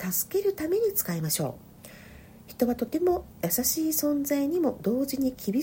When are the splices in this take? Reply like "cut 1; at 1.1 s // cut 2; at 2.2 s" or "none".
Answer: cut 1; at 1.7 s